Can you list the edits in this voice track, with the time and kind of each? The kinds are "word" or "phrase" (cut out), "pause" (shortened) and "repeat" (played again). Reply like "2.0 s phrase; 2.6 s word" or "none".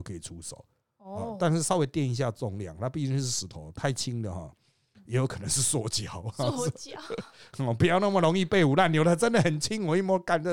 none